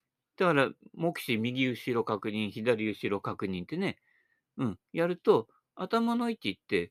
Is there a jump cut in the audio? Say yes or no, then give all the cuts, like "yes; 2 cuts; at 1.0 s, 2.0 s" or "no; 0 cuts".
no; 0 cuts